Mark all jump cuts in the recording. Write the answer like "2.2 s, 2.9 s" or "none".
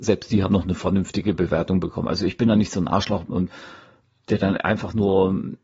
none